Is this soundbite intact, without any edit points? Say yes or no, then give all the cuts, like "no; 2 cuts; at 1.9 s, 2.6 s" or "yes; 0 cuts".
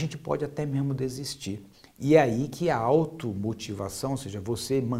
no; 1 cut; at 1.7 s